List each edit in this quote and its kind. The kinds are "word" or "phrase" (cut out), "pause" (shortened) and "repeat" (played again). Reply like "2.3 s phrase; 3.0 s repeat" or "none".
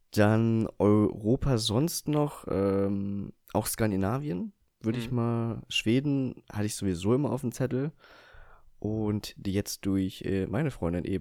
none